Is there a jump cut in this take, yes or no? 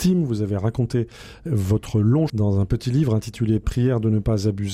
yes